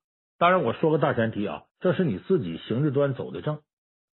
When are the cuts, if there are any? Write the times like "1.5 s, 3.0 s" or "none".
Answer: 1.7 s